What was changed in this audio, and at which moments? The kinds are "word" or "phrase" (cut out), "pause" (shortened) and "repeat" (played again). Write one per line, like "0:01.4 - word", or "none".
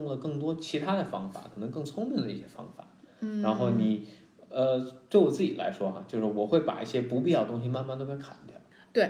none